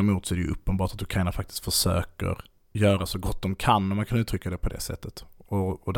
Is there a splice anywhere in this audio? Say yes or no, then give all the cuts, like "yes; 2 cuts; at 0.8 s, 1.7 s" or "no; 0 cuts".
no; 0 cuts